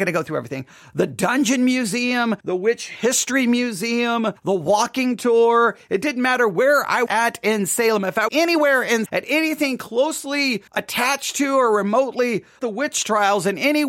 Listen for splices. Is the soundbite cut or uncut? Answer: cut